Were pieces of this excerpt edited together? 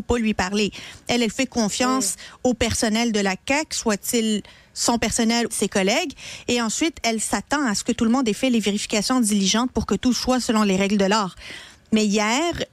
yes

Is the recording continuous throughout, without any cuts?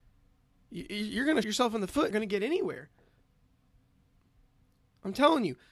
no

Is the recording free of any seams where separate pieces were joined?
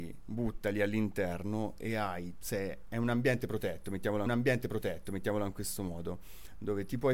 no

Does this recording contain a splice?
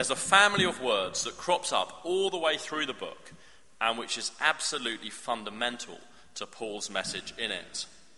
no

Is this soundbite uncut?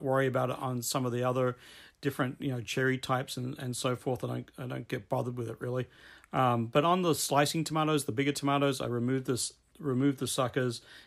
yes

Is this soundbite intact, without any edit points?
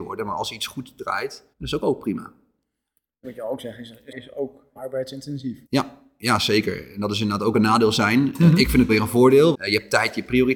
no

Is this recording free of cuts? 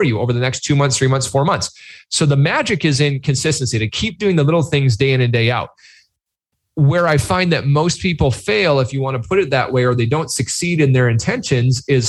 yes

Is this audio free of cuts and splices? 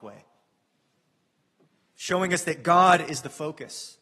yes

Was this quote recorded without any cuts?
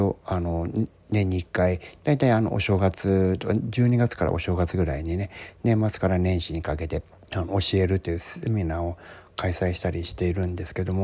no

